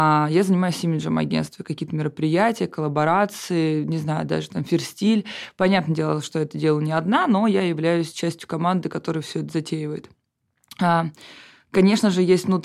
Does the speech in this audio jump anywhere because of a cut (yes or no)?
no